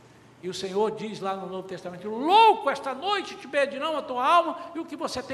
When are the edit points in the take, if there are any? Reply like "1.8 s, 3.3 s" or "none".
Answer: none